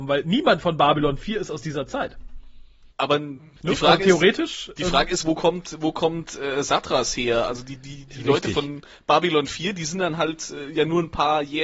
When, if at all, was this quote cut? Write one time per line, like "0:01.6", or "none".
none